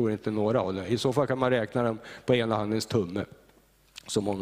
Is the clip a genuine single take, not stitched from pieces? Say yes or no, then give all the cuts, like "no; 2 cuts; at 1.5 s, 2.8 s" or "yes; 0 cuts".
yes; 0 cuts